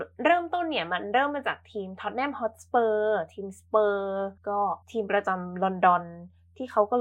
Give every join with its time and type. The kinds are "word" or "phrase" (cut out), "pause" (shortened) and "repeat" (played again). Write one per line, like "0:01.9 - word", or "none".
0:04.4 - pause
0:04.8 - pause